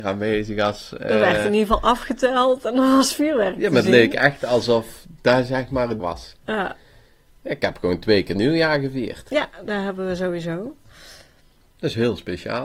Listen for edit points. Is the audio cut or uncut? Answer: cut